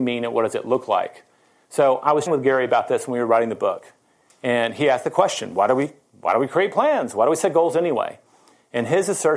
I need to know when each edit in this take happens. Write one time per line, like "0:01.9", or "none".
0:02.3